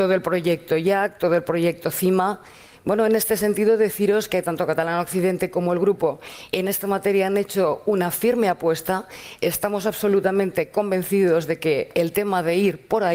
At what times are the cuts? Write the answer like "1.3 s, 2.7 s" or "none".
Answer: none